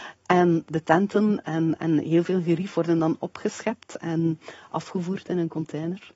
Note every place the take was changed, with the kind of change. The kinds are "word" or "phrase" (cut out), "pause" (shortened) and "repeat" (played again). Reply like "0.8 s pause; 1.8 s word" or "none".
none